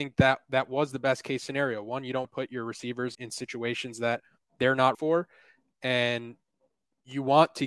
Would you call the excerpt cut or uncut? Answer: cut